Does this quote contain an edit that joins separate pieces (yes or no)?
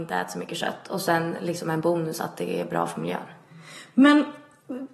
no